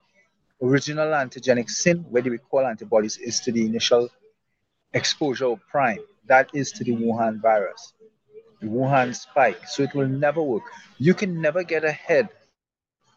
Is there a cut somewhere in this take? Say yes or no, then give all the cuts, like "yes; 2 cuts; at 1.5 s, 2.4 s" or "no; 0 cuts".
no; 0 cuts